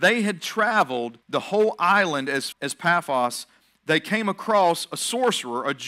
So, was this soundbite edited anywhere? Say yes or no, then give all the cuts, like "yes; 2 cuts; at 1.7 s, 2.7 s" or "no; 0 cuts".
yes; 2 cuts; at 1.2 s, 2.5 s